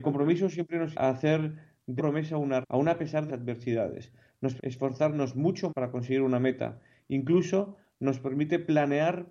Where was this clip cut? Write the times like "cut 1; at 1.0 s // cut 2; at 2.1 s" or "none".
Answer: cut 1; at 0.9 s // cut 2; at 2.0 s // cut 3; at 2.6 s // cut 4; at 3.3 s // cut 5; at 4.6 s // cut 6; at 5.7 s